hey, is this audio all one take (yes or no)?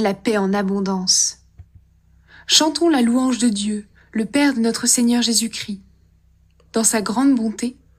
yes